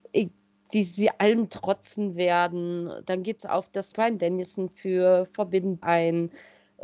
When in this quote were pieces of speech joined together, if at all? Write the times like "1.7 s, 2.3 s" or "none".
3.4 s, 3.9 s, 5.8 s